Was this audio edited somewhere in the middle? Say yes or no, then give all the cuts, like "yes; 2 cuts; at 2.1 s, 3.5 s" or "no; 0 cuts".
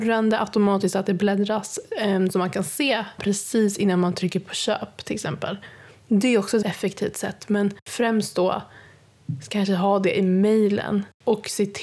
yes; 3 cuts; at 3.2 s, 6.6 s, 7.8 s